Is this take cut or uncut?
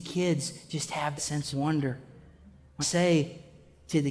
cut